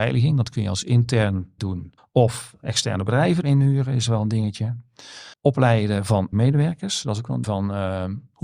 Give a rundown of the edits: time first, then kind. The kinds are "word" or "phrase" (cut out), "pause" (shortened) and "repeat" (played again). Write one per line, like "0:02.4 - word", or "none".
0:01.6 - word
0:02.0 - pause
0:03.4 - word
0:05.3 - pause
0:06.3 - word
0:07.4 - word